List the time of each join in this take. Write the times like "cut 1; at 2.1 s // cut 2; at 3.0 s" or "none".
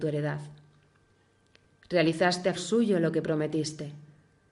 cut 1; at 2.6 s